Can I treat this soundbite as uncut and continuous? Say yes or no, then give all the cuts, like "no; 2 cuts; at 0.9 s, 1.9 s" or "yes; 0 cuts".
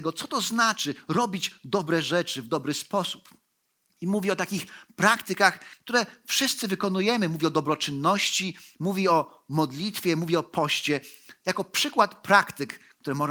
yes; 0 cuts